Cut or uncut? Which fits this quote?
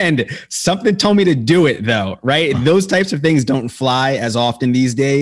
uncut